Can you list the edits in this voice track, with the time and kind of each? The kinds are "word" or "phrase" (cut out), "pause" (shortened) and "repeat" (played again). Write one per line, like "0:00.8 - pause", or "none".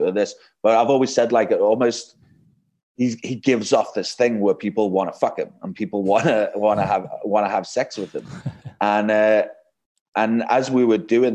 none

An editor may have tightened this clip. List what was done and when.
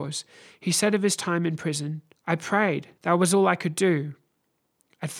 0:02.2 - pause
0:03.0 - pause

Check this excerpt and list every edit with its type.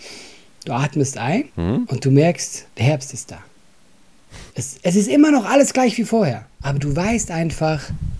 0:01.5 - pause
0:02.7 - pause
0:04.5 - pause
0:06.5 - pause

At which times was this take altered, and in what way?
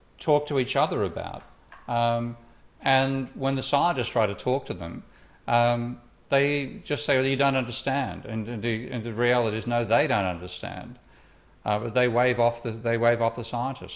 none

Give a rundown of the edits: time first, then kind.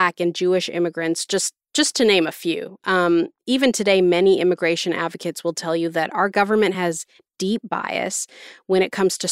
none

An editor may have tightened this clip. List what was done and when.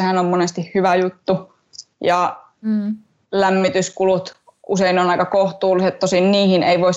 none

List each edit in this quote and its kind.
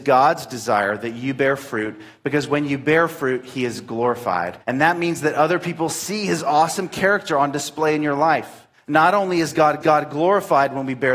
0:04.6 - pause
0:08.7 - pause
0:09.8 - repeat

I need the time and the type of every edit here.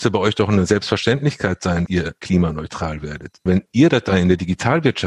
0:01.9 - word
0:03.5 - word

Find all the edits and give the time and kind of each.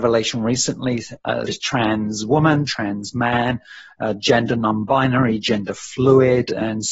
0:01.5 - word

